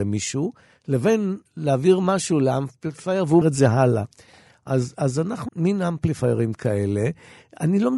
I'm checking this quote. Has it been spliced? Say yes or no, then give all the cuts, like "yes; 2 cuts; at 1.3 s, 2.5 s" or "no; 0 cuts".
yes; 3 cuts; at 1.5 s, 3.4 s, 5.5 s